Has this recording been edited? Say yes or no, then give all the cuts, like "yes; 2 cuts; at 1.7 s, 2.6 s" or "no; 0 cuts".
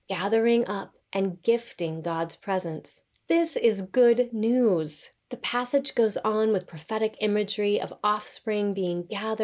yes; 3 cuts; at 1.0 s, 3.1 s, 5.2 s